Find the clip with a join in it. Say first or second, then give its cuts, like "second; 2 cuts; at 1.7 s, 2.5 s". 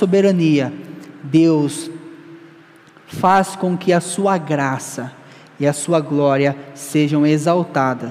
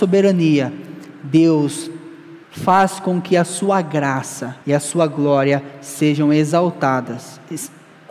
second; 2 cuts; at 2.4 s, 4.6 s